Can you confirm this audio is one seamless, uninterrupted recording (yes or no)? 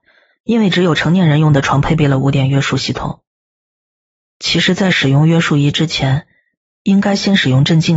yes